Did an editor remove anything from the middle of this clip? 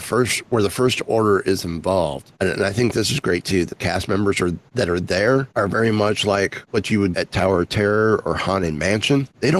yes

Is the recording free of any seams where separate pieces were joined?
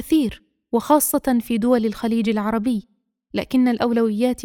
yes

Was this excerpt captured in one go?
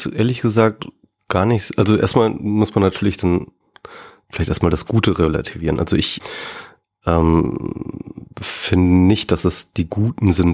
yes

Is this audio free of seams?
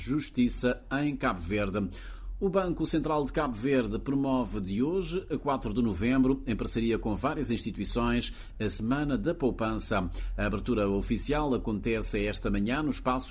yes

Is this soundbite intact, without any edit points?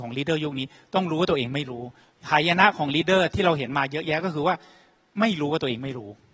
yes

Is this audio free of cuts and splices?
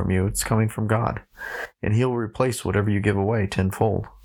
yes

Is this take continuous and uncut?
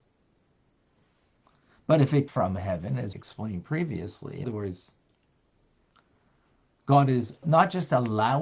no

